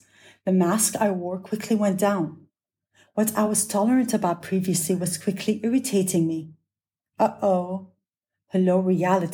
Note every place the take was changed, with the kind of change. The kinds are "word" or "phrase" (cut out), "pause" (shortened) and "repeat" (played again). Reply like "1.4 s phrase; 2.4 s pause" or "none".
none